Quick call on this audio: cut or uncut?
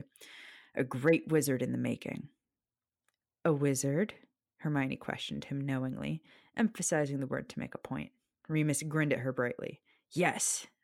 uncut